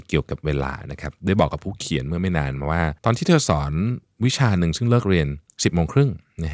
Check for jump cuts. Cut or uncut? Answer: cut